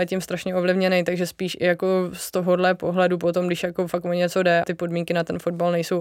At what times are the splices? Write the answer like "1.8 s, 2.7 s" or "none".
4.6 s